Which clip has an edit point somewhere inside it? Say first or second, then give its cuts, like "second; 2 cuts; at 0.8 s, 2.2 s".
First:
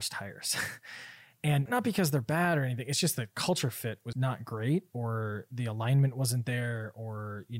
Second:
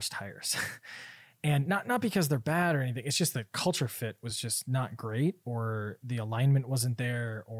first; 2 cuts; at 1.7 s, 4.1 s